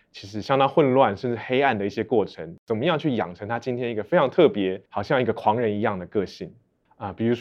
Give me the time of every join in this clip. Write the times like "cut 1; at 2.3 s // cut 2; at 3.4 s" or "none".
cut 1; at 4.9 s